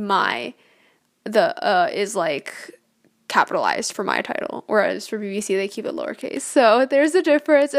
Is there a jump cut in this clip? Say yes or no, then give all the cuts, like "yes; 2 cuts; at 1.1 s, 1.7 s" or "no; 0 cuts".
no; 0 cuts